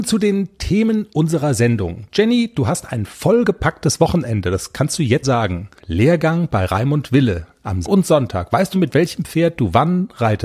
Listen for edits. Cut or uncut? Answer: cut